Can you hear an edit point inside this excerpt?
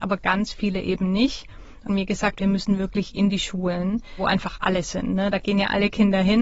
yes; 1 cut; at 1.9 s

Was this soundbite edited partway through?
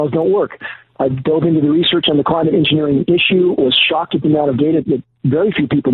yes; 1 cut; at 4.8 s

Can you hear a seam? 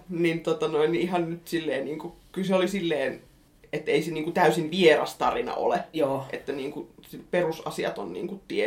no; 0 cuts

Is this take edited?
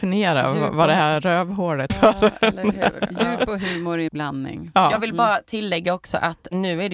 yes; 2 cuts; at 1.9 s, 4.1 s

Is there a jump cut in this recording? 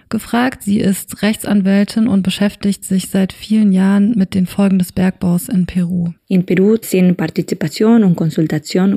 yes; 1 cut; at 6.2 s

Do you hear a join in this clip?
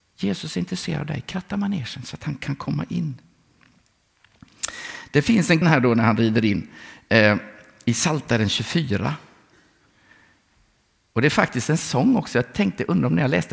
yes; 1 cut; at 5.6 s

